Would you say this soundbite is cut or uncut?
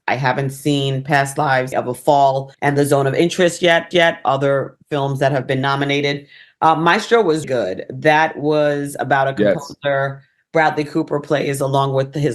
cut